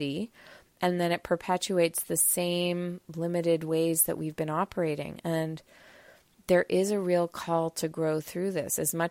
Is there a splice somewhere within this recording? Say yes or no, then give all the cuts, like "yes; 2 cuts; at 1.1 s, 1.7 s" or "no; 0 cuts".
no; 0 cuts